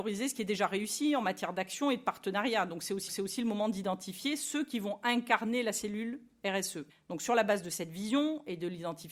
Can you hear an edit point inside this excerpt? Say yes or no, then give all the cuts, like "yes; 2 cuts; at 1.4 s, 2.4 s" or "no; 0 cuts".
yes; 2 cuts; at 3.1 s, 6.9 s